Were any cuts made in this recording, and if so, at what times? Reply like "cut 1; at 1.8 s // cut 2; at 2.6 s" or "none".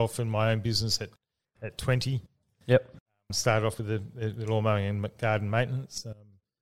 none